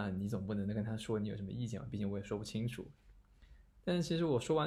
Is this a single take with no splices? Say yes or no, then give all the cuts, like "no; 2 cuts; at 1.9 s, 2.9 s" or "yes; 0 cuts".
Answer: yes; 0 cuts